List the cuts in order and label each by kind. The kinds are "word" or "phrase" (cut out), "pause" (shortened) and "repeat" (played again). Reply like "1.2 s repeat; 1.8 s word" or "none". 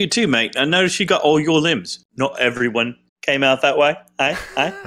3.1 s pause

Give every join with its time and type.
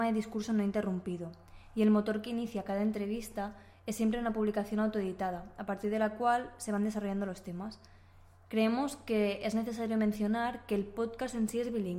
none

